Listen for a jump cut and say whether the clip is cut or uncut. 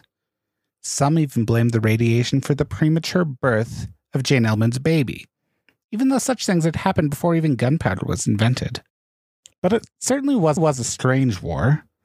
cut